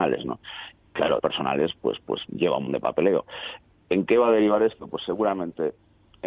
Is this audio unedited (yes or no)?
no